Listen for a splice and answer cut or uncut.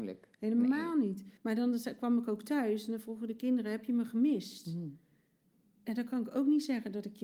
cut